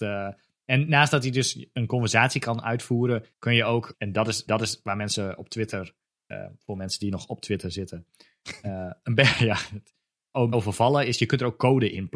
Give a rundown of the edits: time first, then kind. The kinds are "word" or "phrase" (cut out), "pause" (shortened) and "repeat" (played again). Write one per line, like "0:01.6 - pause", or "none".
0:03.3 - pause
0:03.9 - word
0:04.5 - repeat
0:10.5 - word